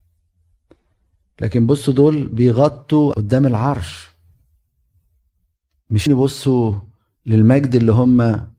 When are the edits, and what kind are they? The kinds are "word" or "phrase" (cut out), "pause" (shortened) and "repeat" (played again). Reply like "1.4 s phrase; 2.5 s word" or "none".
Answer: 3.1 s word; 6.1 s word